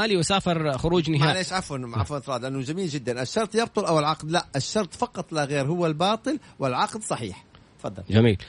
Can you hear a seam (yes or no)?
no